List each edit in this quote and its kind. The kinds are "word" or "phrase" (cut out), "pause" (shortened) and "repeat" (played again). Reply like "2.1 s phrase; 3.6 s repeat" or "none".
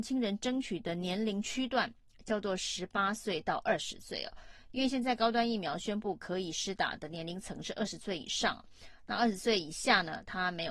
none